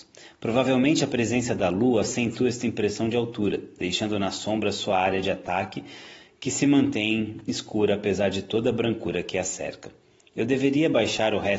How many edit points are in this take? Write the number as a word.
zero